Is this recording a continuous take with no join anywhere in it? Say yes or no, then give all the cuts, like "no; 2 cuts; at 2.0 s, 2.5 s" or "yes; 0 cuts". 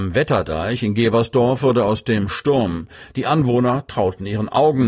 no; 1 cut; at 2.3 s